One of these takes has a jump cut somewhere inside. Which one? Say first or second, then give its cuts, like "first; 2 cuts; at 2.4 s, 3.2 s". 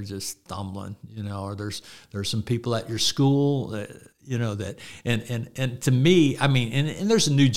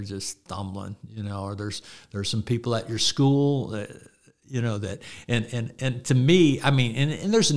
first; 1 cut; at 4.1 s